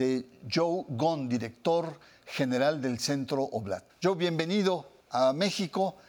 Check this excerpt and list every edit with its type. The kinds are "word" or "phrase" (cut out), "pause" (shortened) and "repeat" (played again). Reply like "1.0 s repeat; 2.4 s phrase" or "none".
3.9 s pause; 5.0 s pause